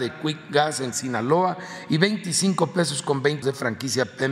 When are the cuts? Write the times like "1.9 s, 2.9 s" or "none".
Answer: 0.9 s, 3.4 s